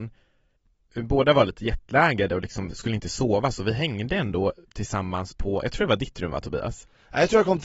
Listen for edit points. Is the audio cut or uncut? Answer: uncut